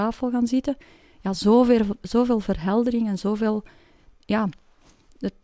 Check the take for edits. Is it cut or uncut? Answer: uncut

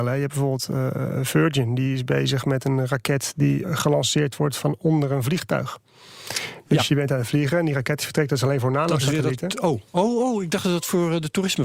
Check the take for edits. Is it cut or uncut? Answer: cut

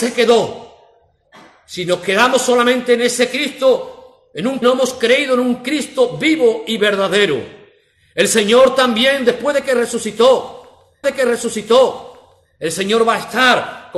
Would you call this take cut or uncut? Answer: cut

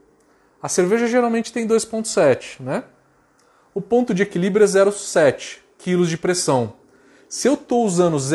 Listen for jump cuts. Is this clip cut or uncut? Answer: uncut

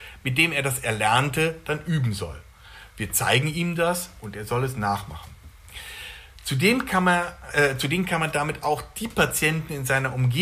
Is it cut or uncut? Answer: uncut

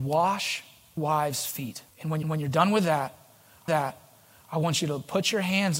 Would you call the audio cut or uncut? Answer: cut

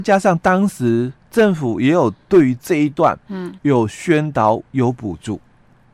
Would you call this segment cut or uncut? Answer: cut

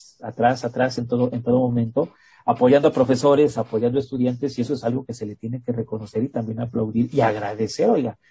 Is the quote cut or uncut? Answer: uncut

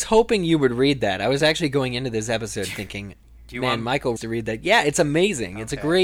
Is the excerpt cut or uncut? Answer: cut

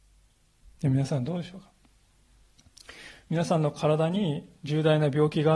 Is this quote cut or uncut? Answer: cut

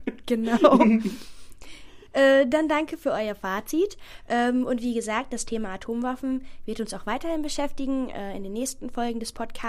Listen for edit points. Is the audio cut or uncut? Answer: cut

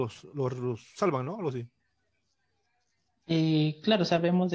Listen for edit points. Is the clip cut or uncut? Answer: uncut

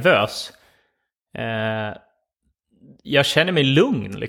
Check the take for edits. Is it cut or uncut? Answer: uncut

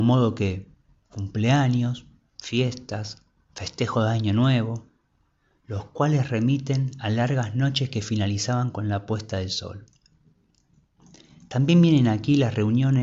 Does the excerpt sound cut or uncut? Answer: uncut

